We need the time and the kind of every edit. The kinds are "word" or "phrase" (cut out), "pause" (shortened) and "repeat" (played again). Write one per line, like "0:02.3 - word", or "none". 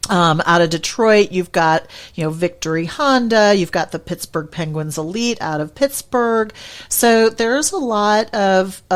none